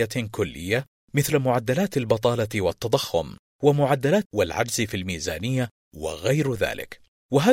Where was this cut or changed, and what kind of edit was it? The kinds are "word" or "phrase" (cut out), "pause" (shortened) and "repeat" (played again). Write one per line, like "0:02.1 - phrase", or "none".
0:04.2 - phrase